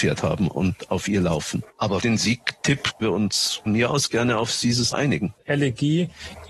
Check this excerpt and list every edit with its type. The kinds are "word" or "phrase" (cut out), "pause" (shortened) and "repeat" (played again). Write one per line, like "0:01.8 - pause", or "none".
0:02.0 - word
0:03.0 - word
0:03.7 - word
0:04.9 - word